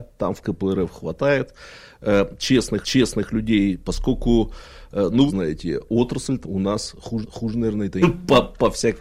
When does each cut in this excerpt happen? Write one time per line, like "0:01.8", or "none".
0:02.8
0:05.3
0:06.4
0:07.2
0:08.0

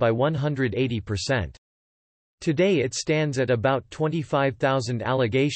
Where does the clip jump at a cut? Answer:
none

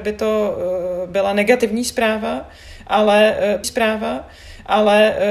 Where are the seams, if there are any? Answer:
0:03.6

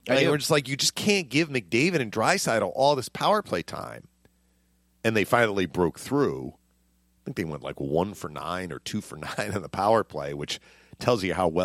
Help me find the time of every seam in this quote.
none

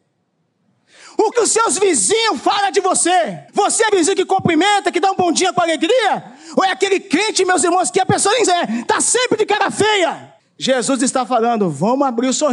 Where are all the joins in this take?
0:01.3
0:03.5
0:03.9
0:08.5
0:10.4

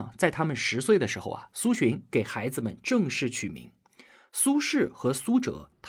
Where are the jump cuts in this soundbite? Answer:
none

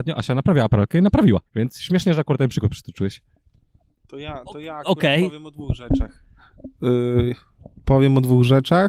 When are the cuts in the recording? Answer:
0:01.5

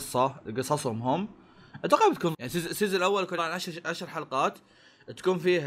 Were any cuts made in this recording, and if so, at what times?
0:02.3
0:03.4

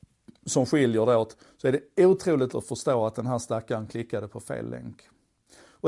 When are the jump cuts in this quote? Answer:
0:02.5

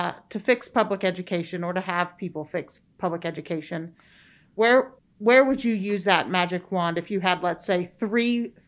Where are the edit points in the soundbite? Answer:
0:05.0

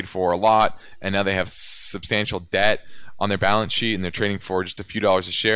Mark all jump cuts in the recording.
none

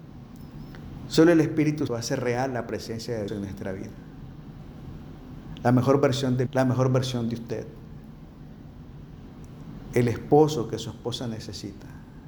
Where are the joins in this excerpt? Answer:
0:01.9
0:03.3
0:06.5

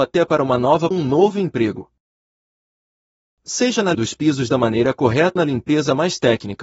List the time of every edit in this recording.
0:00.9
0:03.9
0:05.4

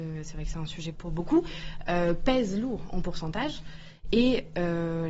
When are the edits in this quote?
0:00.9

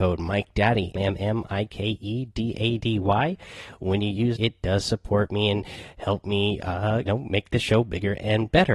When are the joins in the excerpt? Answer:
0:01.0
0:02.8
0:04.4
0:07.1

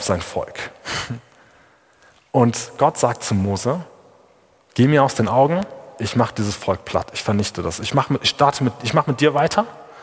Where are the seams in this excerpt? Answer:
none

